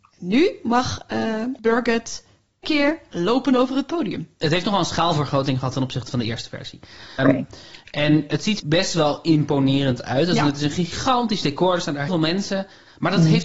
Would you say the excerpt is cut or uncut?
cut